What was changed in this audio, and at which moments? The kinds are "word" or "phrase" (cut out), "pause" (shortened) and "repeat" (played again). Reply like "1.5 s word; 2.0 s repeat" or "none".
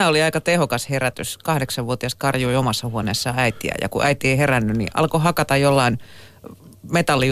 none